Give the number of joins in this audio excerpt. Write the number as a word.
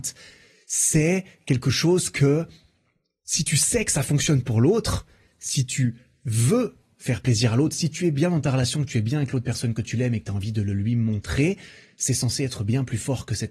zero